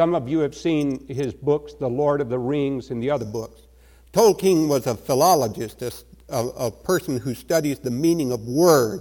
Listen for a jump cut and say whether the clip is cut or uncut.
uncut